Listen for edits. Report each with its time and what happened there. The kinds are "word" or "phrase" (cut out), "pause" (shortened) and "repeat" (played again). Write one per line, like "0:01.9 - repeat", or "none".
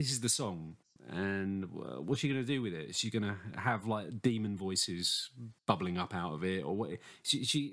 none